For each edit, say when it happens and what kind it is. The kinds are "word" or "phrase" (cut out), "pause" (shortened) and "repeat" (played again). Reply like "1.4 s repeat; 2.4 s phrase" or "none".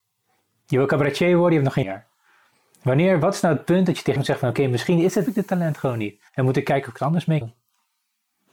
1.8 s phrase; 4.2 s word; 5.3 s word; 6.3 s pause; 7.0 s word; 7.4 s word